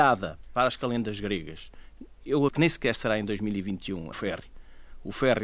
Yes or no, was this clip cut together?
yes